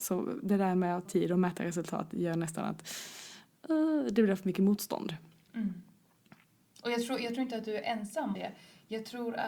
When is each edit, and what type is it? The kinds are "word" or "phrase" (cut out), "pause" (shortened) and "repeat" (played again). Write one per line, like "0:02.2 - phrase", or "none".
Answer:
0:01.1 - word
0:08.4 - word